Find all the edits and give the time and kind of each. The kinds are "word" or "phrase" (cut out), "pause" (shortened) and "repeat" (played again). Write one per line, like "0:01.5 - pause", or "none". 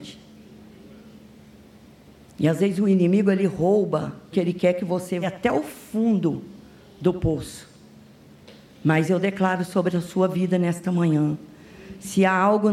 0:04.3 - word
0:05.2 - word